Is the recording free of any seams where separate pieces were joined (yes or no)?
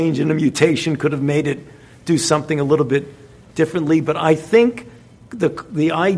yes